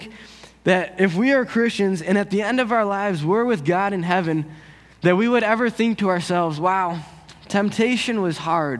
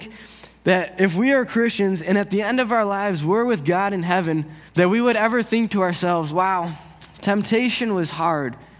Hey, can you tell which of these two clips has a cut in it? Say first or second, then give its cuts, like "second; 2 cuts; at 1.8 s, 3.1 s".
second; 1 cut; at 4.7 s